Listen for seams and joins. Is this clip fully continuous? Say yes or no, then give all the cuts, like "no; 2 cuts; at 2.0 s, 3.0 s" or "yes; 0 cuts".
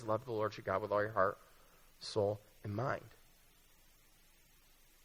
yes; 0 cuts